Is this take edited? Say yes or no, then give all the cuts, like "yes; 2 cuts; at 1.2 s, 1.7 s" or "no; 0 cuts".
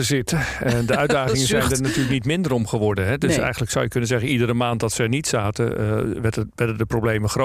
no; 0 cuts